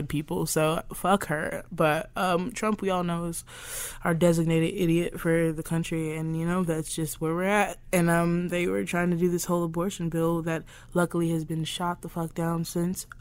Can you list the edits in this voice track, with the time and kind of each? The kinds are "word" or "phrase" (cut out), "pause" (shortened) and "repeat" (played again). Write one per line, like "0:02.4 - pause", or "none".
none